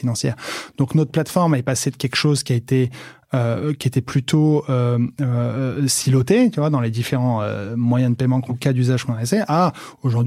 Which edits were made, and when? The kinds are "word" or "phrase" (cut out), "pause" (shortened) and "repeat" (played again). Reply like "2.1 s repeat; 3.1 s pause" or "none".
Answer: 8.5 s word